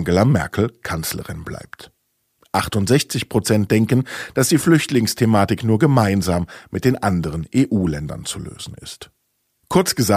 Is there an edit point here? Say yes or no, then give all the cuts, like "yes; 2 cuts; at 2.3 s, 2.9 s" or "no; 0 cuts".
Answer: no; 0 cuts